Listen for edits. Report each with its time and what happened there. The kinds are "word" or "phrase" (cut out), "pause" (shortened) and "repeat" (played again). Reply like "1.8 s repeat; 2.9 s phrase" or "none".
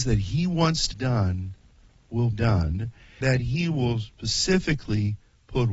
0.9 s word; 2.3 s word; 3.2 s word